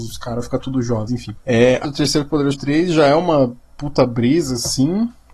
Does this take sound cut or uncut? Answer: cut